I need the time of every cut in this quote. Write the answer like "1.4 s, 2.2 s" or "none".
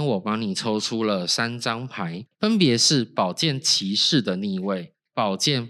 2.3 s